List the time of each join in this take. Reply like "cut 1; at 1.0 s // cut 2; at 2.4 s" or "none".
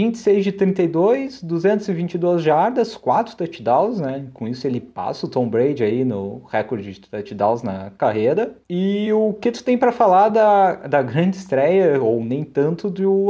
none